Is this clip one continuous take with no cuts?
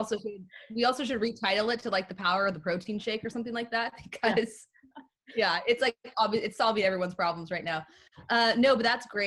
yes; 0 cuts

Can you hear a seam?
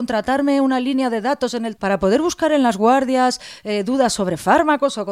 yes; 1 cut; at 1.8 s

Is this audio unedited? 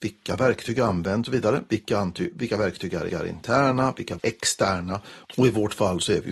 no; 3 cuts; at 1.3 s, 3.1 s, 4.2 s

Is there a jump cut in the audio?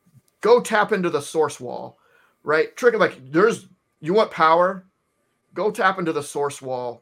no; 0 cuts

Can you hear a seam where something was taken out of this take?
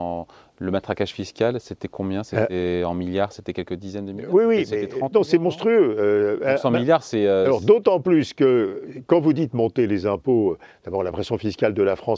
no; 0 cuts

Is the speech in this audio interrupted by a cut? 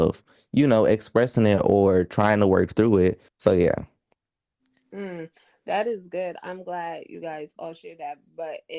yes; 1 cut; at 3.3 s

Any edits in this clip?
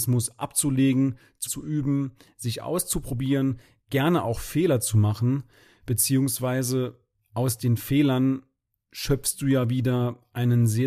yes; 1 cut; at 1.5 s

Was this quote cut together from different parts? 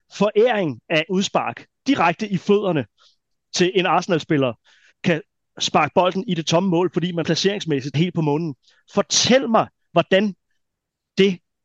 yes; 4 cuts; at 1.1 s, 4.9 s, 7.2 s, 7.9 s

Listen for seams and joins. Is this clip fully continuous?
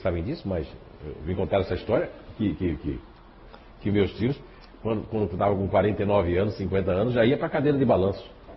yes; 0 cuts

